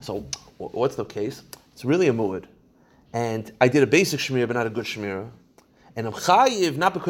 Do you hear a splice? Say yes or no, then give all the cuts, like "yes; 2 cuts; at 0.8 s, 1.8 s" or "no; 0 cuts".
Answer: no; 0 cuts